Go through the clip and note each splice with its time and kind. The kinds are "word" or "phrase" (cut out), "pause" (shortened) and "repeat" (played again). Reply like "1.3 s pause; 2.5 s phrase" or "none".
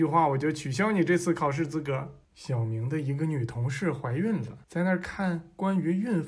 2.2 s pause; 4.6 s pause